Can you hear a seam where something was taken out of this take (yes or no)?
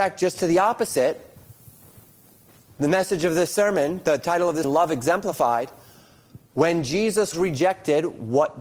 yes